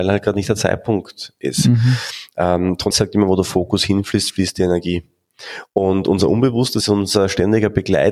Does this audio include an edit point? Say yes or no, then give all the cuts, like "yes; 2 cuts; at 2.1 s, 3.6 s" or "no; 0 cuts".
yes; 2 cuts; at 2.9 s, 6.8 s